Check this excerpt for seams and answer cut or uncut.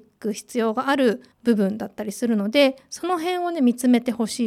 cut